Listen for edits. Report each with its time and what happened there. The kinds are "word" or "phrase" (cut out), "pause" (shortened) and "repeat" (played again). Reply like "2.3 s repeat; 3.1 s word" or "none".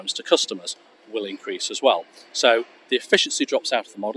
none